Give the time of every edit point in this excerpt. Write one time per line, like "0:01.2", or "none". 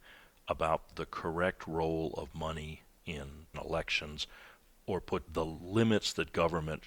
0:03.5
0:05.3